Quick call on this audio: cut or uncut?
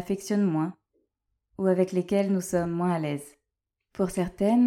uncut